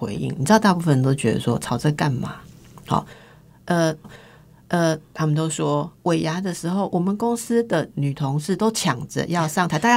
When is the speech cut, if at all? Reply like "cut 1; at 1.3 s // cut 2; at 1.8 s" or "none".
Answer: cut 1; at 4.0 s